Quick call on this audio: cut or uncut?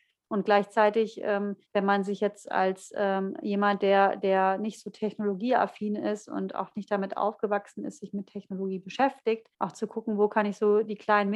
cut